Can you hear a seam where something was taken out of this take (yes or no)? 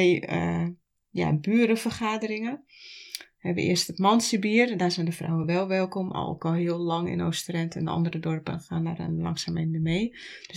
no